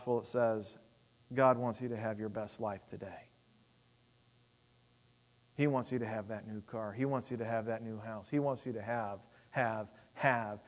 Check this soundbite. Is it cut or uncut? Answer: uncut